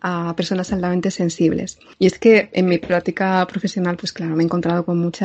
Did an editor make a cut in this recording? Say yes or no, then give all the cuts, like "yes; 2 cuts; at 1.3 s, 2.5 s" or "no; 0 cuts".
no; 0 cuts